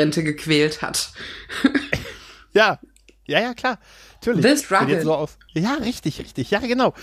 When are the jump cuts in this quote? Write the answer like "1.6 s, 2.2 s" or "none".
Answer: 5.0 s, 5.5 s